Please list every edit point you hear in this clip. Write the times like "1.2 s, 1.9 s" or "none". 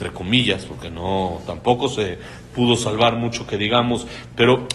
none